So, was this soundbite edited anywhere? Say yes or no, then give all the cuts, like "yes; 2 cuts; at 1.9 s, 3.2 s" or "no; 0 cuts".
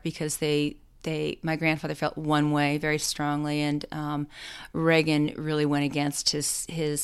no; 0 cuts